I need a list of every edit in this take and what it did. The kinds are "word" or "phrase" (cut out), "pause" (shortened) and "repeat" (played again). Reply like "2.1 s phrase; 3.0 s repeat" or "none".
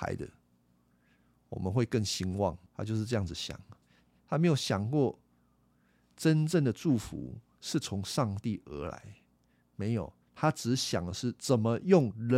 2.7 s pause